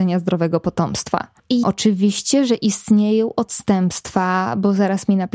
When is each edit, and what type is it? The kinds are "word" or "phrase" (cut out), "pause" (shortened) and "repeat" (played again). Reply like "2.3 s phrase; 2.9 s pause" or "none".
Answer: 1.6 s phrase